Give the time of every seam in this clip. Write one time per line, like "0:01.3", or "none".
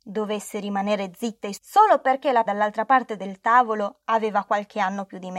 0:01.6
0:02.5

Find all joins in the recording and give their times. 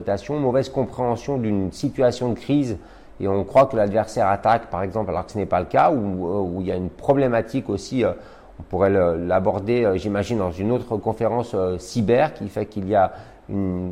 none

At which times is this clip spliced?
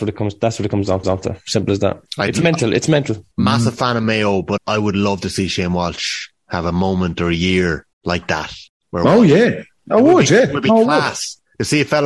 0:01.0
0:02.1
0:03.3
0:04.6
0:07.9
0:08.7

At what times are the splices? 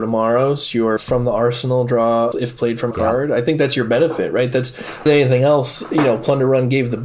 0:01.0
0:02.3
0:02.9
0:05.1

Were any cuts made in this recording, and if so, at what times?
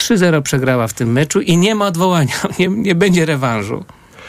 none

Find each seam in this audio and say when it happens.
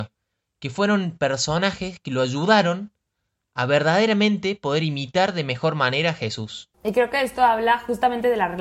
0:06.7

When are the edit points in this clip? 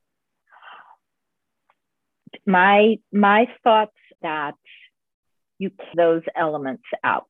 0:04.1
0:05.9

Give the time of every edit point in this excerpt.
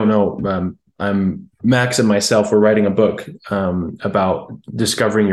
none

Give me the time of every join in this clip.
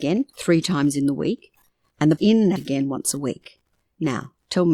0:02.2
0:02.6

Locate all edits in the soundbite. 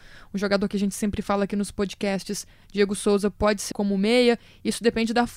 0:03.7

